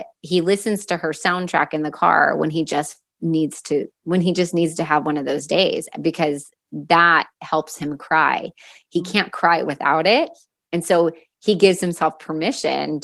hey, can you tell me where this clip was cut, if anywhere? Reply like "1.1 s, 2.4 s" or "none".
none